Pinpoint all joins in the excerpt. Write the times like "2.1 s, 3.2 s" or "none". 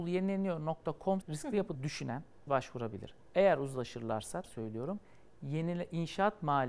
1.2 s, 1.7 s, 2.5 s, 4.4 s